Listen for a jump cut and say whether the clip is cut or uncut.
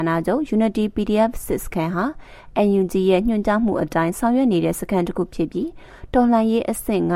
uncut